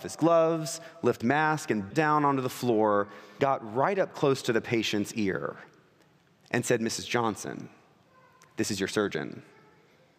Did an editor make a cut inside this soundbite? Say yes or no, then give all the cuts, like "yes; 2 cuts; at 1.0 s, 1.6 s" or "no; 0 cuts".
yes; 3 cuts; at 1.2 s, 1.9 s, 3.4 s